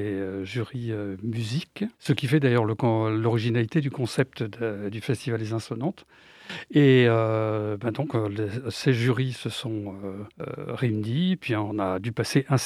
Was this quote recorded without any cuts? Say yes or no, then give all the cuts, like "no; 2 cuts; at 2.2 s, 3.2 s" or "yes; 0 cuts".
no; 2 cuts; at 1.9 s, 10.3 s